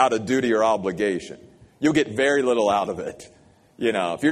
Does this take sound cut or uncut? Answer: uncut